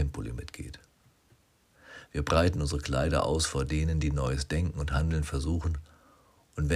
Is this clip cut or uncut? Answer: uncut